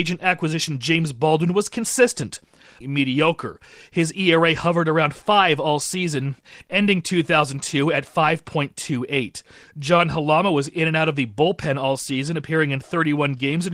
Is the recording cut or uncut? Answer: cut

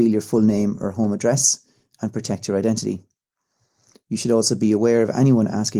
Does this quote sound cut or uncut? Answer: uncut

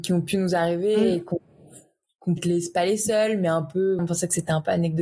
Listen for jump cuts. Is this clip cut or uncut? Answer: cut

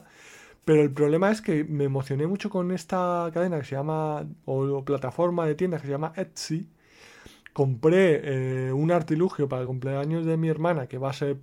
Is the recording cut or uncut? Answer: uncut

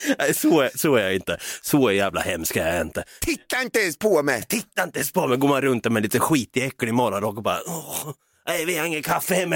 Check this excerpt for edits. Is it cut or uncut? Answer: uncut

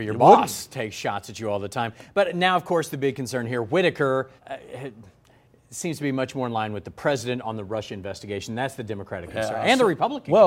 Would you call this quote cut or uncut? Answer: cut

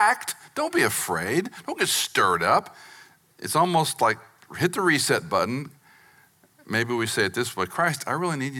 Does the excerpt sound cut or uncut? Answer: uncut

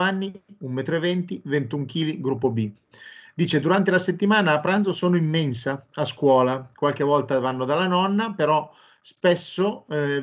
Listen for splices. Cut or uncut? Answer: uncut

